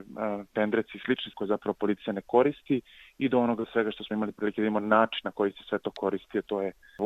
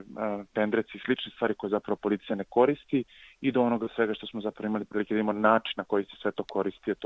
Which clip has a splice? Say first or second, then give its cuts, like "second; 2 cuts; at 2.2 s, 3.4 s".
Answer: first; 2 cuts; at 1.3 s, 4.1 s